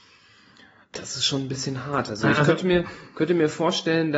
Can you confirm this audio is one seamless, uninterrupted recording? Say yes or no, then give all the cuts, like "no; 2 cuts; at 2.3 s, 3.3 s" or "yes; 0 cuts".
yes; 0 cuts